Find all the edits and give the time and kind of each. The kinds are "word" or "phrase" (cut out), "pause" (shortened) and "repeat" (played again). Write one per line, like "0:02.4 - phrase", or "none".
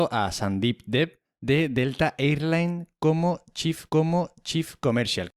0:03.9 - repeat